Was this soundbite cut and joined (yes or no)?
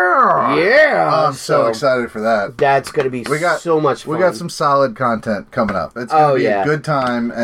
no